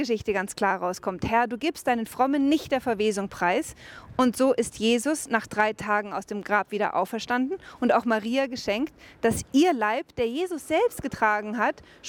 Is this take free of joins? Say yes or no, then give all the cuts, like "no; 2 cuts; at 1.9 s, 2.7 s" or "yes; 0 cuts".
yes; 0 cuts